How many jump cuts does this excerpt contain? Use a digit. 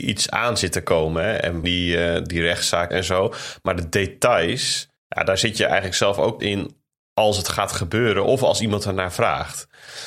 4